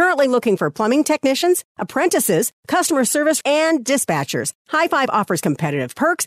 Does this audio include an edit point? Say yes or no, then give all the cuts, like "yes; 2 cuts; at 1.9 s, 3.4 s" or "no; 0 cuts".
yes; 2 cuts; at 1.7 s, 3.4 s